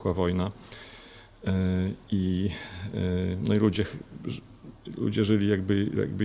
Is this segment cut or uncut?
uncut